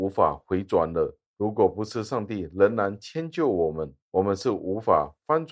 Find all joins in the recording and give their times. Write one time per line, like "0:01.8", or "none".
0:01.3
0:04.0